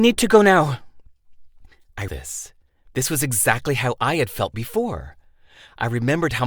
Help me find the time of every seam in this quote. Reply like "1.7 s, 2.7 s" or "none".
2.1 s, 4.5 s